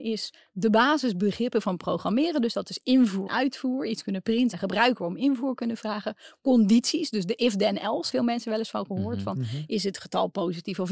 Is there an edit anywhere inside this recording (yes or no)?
yes